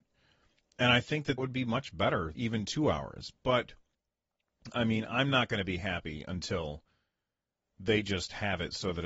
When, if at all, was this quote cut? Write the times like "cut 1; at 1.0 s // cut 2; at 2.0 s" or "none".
cut 1; at 1.4 s // cut 2; at 2.3 s